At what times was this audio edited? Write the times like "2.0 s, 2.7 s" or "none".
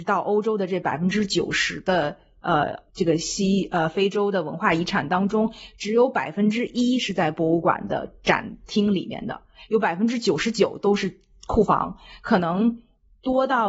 2.9 s